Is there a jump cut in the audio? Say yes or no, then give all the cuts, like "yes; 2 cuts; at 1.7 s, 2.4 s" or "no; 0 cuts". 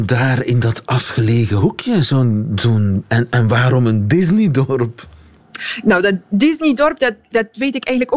yes; 1 cut; at 7.2 s